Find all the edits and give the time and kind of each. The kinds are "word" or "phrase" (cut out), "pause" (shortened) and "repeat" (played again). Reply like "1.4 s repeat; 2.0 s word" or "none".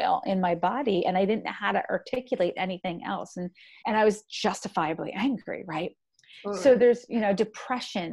3.8 s word